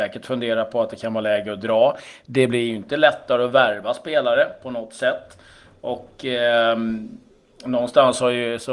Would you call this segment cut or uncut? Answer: uncut